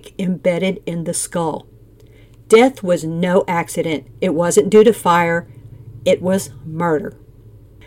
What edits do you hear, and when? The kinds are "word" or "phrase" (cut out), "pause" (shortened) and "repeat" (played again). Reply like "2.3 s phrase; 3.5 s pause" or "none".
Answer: none